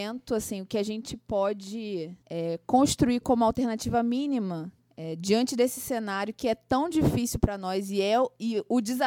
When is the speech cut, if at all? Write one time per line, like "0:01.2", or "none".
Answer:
0:02.2
0:04.8